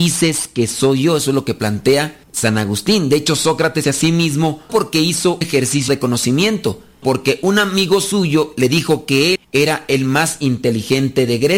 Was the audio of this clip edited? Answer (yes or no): yes